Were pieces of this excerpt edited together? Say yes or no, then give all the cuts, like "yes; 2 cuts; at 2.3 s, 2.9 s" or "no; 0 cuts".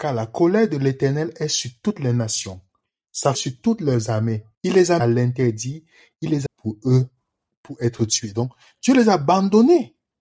yes; 4 cuts; at 3.3 s, 4.5 s, 5.0 s, 6.5 s